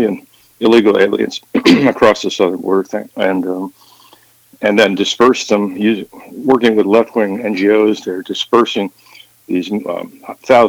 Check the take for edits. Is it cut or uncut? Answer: uncut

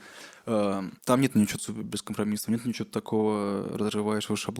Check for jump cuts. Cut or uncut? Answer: cut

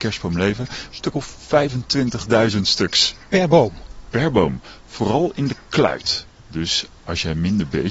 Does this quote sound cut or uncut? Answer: uncut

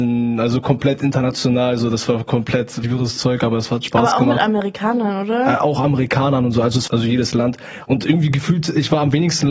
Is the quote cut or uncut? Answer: cut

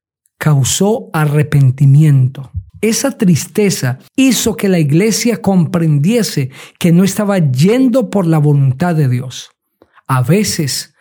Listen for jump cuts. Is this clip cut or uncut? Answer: cut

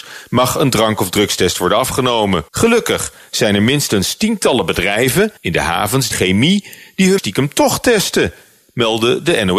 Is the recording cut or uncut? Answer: cut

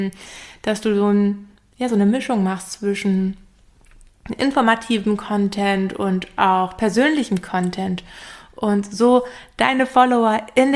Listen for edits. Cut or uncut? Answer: uncut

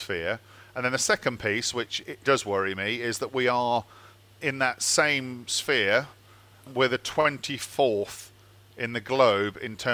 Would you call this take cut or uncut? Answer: cut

